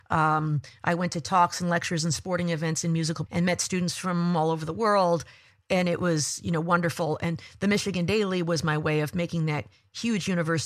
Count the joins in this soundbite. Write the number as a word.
one